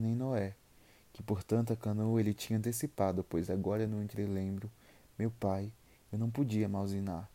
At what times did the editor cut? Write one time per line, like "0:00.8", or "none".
none

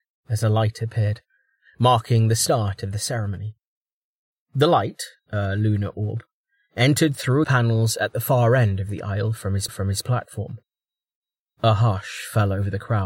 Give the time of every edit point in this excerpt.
0:07.4
0:09.7

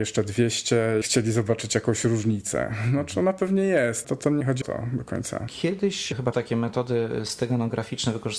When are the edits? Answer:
0:01.0
0:04.0
0:04.6
0:06.3

